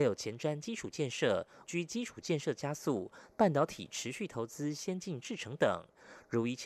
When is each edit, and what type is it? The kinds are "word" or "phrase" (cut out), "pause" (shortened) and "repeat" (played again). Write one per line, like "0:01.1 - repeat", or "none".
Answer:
0:01.6 - word